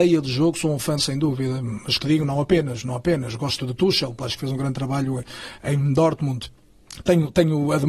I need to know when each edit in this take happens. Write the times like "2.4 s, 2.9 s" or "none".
1.0 s, 2.0 s, 3.6 s, 4.2 s